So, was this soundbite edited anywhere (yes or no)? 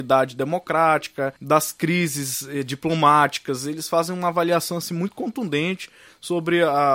yes